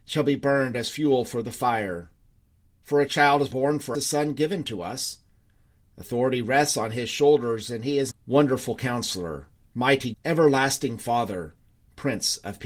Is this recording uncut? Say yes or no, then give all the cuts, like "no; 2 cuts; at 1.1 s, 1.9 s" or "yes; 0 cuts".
no; 4 cuts; at 3.5 s, 3.9 s, 8.1 s, 10.1 s